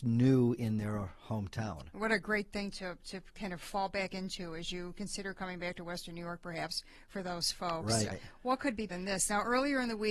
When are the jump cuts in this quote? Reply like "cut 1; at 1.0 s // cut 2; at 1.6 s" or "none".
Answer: cut 1; at 8.1 s // cut 2; at 8.9 s